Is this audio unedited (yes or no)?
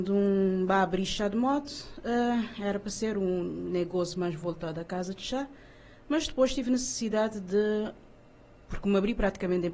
yes